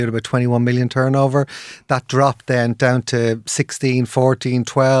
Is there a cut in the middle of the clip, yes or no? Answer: no